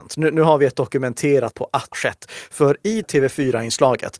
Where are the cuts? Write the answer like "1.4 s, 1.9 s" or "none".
1.5 s, 1.9 s, 3.0 s